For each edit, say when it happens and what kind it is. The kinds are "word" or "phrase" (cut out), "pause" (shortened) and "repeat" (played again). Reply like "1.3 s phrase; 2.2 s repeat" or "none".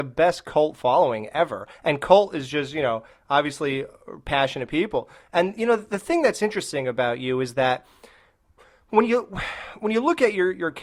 none